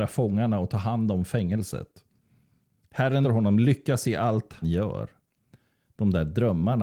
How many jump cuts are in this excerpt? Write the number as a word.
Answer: two